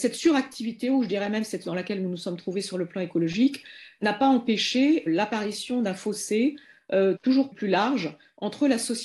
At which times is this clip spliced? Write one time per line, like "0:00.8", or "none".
0:01.6
0:05.1
0:07.2
0:07.5